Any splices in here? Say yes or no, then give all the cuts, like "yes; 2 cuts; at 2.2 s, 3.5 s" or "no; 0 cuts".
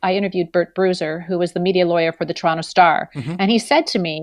no; 0 cuts